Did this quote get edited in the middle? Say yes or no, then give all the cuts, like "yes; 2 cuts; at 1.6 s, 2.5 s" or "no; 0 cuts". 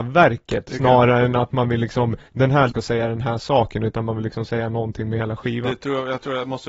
yes; 2 cuts; at 2.3 s, 2.7 s